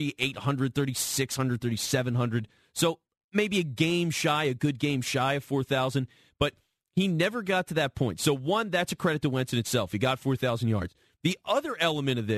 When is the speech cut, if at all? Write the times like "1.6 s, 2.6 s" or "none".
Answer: none